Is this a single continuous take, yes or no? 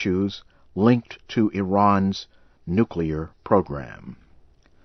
yes